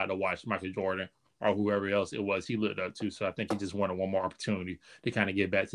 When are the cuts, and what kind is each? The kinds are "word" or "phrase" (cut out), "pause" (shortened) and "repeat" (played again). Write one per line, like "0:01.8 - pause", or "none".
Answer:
none